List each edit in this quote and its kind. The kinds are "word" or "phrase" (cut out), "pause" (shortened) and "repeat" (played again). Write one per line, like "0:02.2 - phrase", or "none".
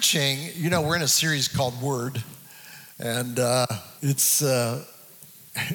0:02.9 - pause
0:04.0 - pause

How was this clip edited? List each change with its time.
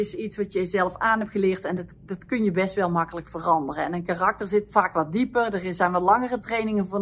none

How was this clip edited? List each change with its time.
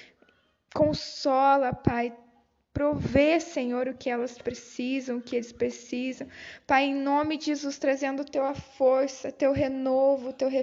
none

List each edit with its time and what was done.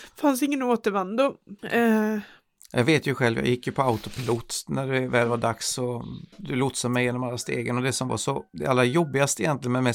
0:01.6 - pause
0:06.3 - pause
0:08.5 - pause

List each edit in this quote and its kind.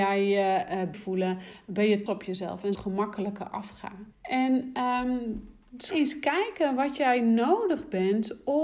0:00.9 - word
0:02.1 - word
0:02.7 - phrase
0:04.1 - pause
0:05.9 - word

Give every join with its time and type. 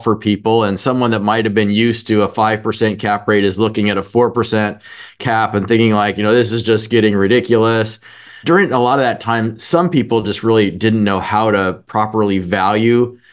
none

